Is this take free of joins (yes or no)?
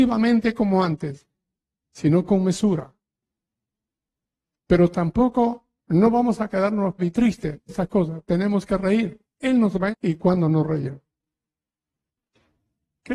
no